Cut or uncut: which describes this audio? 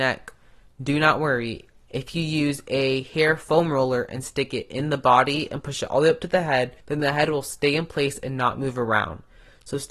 cut